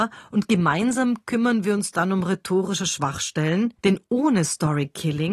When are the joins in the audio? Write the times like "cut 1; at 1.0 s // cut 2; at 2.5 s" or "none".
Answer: cut 1; at 3.8 s